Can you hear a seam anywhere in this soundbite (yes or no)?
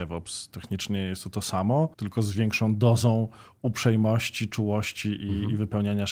yes